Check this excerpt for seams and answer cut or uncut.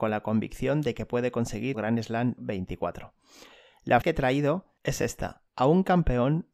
cut